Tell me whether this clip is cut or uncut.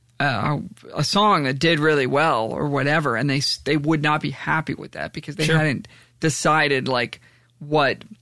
uncut